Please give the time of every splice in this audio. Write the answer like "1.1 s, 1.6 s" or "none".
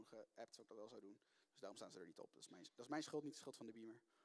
none